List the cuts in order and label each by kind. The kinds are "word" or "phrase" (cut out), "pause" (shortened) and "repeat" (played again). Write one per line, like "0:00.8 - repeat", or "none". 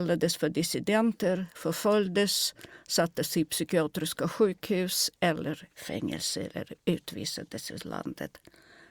none